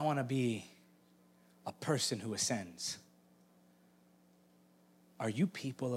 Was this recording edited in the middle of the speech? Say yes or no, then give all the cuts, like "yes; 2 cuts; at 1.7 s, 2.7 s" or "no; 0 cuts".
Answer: no; 0 cuts